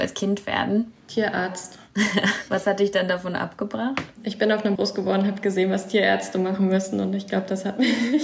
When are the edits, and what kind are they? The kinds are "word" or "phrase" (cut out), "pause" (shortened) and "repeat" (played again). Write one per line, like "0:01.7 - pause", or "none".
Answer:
0:04.8 - word